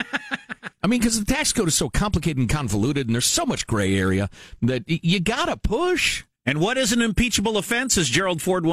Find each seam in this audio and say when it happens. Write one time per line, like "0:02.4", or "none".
0:06.3